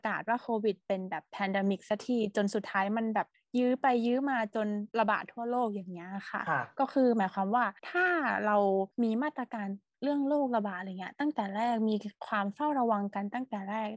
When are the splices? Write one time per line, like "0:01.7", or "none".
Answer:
0:03.3
0:04.9
0:07.8
0:08.9